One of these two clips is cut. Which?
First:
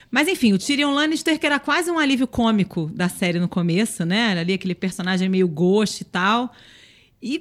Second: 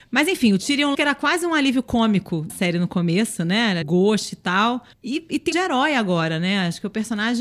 second; 5 cuts; at 0.9 s, 2.5 s, 3.8 s, 4.9 s, 5.5 s

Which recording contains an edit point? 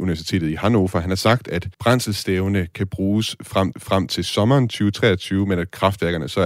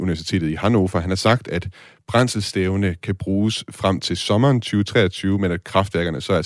first; 2 cuts; at 1.7 s, 3.7 s

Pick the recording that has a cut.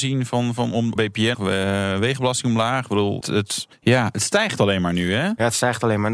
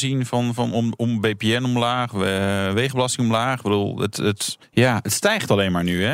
first; 3 cuts; at 1.0 s, 1.3 s, 3.2 s

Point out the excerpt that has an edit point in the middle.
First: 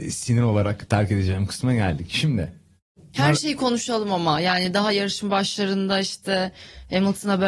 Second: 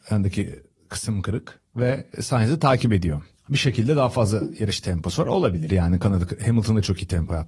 second; 1 cut; at 3.3 s

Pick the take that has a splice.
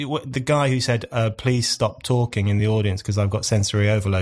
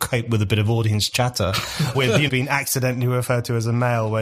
second; 2 cuts; at 1.9 s, 2.3 s

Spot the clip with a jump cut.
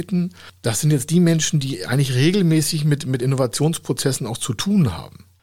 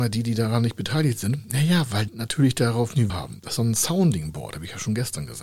second; 3 cuts; at 2.1 s, 3.1 s, 3.6 s

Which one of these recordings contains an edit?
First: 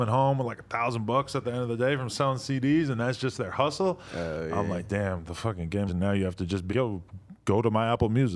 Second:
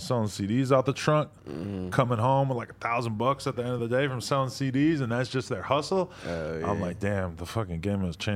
first; 2 cuts; at 5.9 s, 6.7 s

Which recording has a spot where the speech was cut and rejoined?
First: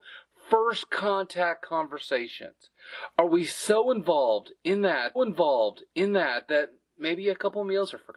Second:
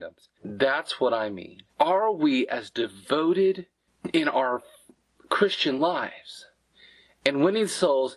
first; 1 cut; at 5.1 s

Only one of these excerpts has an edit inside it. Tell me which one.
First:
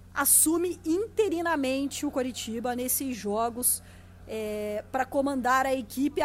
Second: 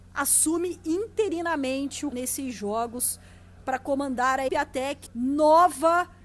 second; 4 cuts; at 2.1 s, 3.6 s, 4.5 s, 5.1 s

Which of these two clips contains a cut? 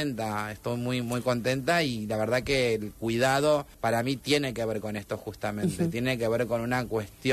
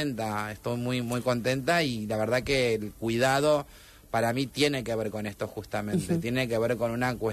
first; 1 cut; at 3.7 s

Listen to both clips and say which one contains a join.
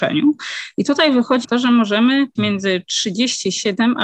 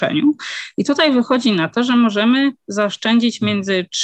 first; 2 cuts; at 1.4 s, 2.4 s

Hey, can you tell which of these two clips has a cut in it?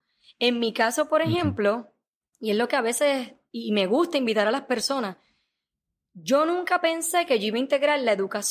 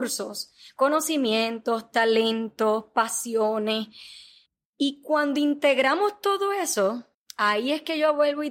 second; 2 cuts; at 4.5 s, 7.1 s

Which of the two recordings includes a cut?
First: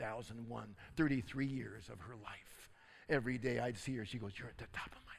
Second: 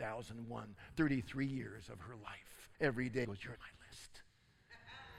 second; 3 cuts; at 2.7 s, 3.2 s, 3.6 s

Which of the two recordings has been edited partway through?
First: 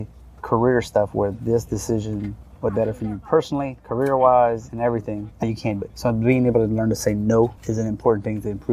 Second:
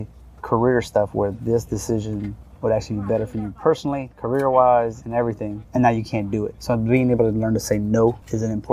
first; 3 cuts; at 2.7 s, 5.4 s, 5.8 s

